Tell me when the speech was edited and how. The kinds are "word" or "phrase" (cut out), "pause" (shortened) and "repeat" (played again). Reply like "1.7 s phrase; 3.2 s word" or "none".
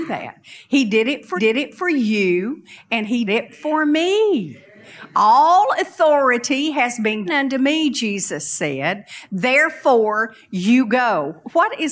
1.4 s repeat; 3.3 s word; 7.3 s word